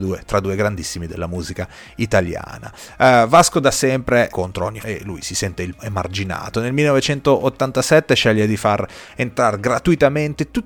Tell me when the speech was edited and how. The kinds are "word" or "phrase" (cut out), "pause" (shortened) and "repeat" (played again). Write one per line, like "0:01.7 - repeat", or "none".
0:04.3 - word
0:04.8 - phrase
0:05.8 - word